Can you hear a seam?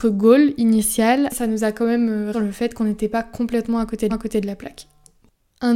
yes; 3 cuts; at 1.3 s, 2.3 s, 4.1 s

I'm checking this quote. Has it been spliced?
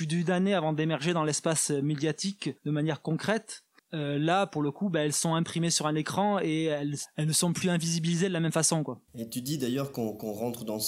yes; 3 cuts; at 2.6 s, 3.8 s, 9.1 s

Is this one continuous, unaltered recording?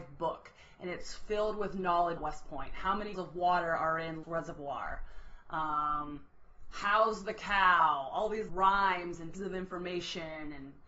no; 5 cuts; at 2.2 s, 3.1 s, 4.2 s, 8.5 s, 9.3 s

